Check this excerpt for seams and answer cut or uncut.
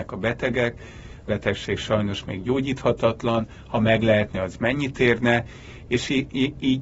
cut